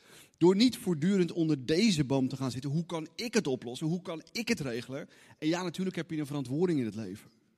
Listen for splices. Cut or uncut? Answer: uncut